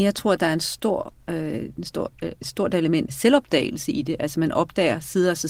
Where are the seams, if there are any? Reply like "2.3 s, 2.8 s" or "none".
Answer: 3.1 s